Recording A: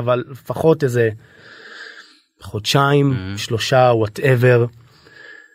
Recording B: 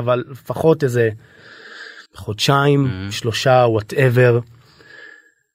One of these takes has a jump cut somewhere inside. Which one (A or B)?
B